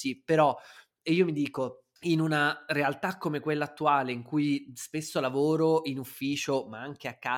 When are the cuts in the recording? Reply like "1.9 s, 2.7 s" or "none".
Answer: none